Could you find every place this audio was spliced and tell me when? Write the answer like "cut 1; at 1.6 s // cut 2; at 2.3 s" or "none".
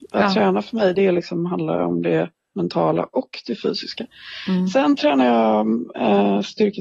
none